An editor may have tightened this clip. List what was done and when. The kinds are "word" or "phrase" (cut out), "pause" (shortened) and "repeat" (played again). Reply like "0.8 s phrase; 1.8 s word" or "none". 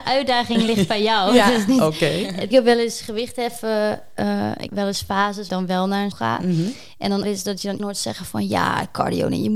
2.5 s phrase; 4.7 s word; 5.5 s phrase; 6.1 s word; 7.2 s phrase; 7.8 s word